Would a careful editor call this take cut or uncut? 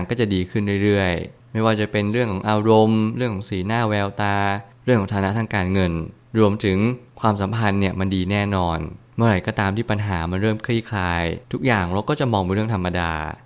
cut